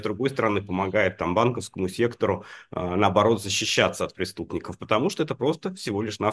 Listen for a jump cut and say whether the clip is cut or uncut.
uncut